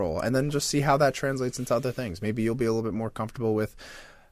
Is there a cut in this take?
no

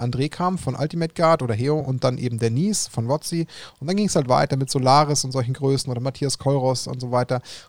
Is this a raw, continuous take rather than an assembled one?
yes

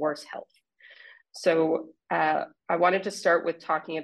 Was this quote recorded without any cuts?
yes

